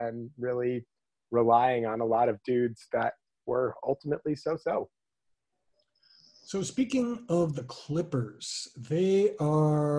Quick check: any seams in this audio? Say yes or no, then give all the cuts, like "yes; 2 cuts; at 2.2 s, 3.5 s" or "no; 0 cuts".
no; 0 cuts